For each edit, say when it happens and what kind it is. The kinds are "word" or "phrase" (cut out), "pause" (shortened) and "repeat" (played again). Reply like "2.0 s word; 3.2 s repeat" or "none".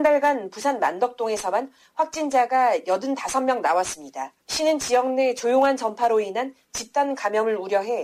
4.4 s pause